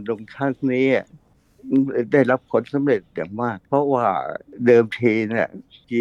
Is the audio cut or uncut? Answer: cut